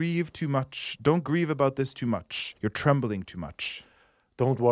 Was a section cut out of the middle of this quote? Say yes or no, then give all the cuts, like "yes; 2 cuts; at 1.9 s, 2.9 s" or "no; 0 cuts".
yes; 1 cut; at 2.6 s